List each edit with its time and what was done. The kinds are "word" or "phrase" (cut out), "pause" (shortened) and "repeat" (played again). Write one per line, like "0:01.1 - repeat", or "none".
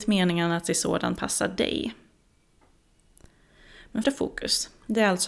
0:01.2 - word
0:04.0 - word